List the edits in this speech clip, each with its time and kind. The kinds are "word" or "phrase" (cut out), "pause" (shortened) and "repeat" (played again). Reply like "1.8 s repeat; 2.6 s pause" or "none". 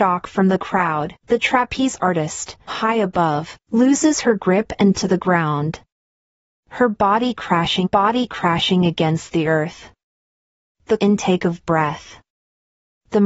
1.2 s pause; 2.7 s word; 3.6 s pause; 4.9 s word; 7.8 s repeat; 11.0 s word